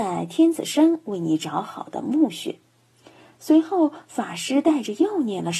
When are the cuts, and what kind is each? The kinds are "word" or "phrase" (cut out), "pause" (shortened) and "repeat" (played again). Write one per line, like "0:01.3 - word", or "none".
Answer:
none